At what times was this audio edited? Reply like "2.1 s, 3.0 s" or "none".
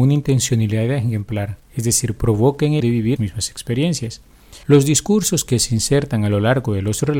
1.7 s, 2.8 s, 3.2 s, 4.6 s